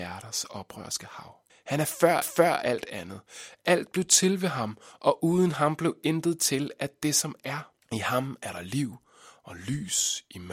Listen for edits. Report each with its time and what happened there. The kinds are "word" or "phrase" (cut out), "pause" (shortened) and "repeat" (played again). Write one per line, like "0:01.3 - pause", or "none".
0:01.5 - pause
0:02.2 - repeat
0:07.8 - pause